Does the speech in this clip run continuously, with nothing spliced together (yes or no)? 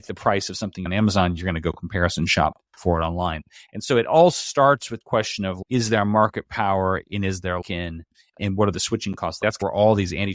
no